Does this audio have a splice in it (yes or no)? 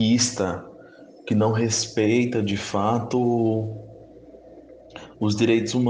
no